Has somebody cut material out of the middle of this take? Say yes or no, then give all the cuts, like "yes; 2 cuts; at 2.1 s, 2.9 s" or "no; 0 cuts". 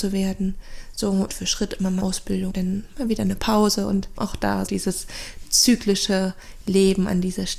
yes; 5 cuts; at 1.3 s, 2.0 s, 2.5 s, 4.2 s, 4.7 s